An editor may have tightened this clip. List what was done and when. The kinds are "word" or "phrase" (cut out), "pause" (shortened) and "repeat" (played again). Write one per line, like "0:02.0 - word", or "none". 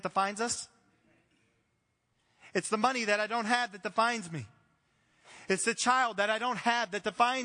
none